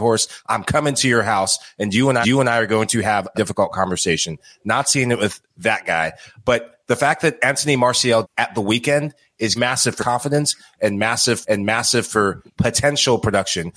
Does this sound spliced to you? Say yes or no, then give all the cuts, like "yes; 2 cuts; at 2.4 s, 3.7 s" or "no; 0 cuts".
yes; 6 cuts; at 2.2 s, 3.3 s, 8.2 s, 9.6 s, 10.0 s, 11.4 s